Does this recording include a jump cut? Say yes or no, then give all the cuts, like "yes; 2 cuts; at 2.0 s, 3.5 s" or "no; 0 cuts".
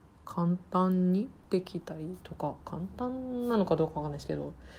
yes; 1 cut; at 1.4 s